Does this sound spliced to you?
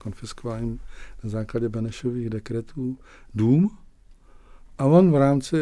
no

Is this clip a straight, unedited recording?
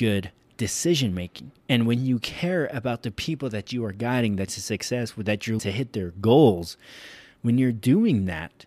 no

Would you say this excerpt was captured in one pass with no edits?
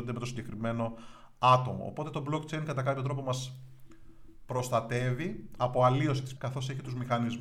no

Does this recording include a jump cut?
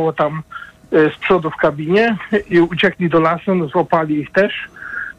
no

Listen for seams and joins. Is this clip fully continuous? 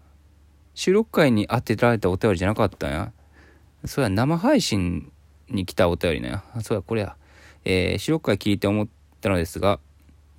yes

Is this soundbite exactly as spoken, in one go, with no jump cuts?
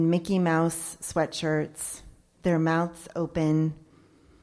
yes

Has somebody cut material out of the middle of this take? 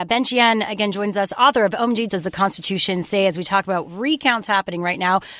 yes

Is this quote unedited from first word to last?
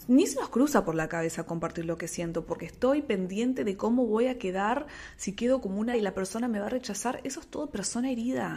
no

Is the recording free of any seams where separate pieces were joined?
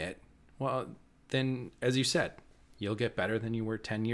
yes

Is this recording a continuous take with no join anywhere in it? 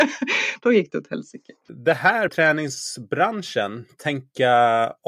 no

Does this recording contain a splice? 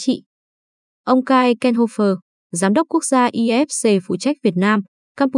no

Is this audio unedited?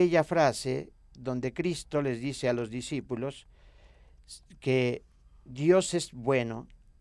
yes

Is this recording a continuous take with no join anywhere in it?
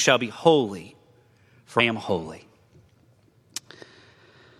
no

